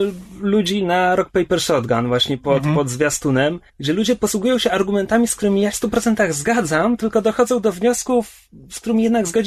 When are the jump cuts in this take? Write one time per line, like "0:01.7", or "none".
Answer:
0:03.7
0:05.7